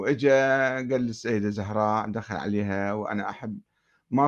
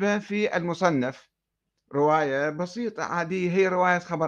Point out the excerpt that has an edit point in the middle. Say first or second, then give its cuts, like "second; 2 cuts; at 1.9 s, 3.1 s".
second; 1 cut; at 1.5 s